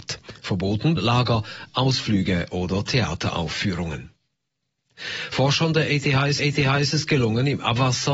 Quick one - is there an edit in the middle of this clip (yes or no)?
yes